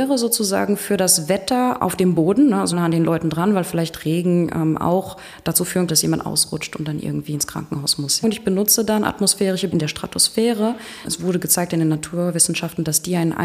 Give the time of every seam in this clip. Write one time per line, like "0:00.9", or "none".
0:02.7
0:05.9
0:09.7